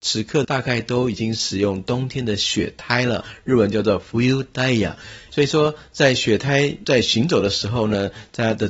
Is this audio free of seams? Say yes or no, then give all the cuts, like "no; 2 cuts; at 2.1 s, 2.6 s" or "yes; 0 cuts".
yes; 0 cuts